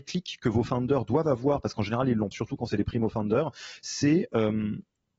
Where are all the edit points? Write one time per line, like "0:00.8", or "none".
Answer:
0:02.3